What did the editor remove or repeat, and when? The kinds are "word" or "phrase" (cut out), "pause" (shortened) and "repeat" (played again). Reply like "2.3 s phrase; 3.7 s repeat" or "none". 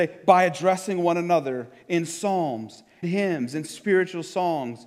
3.0 s word